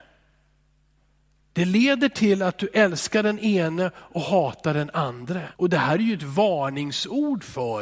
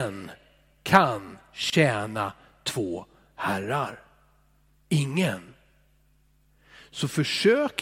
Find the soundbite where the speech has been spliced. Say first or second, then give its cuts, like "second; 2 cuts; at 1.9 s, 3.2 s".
first; 1 cut; at 5.6 s